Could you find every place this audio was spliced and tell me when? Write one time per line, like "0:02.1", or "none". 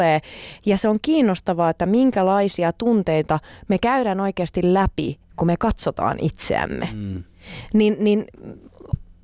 none